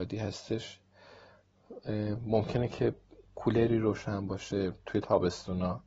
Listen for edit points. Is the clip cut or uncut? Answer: cut